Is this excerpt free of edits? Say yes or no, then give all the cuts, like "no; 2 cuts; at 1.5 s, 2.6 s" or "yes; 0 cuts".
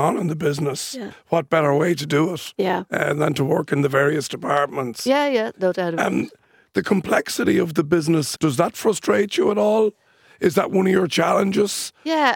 no; 1 cut; at 8.3 s